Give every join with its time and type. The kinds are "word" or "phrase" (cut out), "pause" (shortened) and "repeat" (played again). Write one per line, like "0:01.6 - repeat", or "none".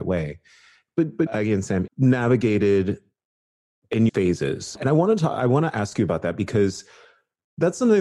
0:01.3 - phrase
0:01.9 - phrase
0:04.1 - phrase